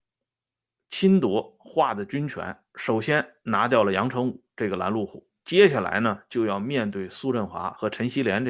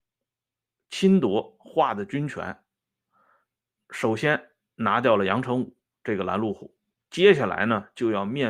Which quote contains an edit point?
first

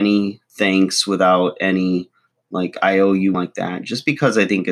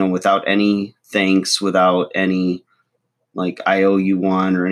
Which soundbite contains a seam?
first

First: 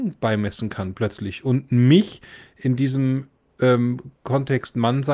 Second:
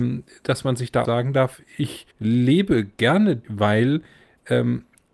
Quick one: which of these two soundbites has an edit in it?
second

